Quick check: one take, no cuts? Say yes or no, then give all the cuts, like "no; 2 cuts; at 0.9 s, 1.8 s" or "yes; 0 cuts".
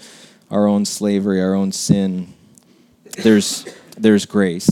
yes; 0 cuts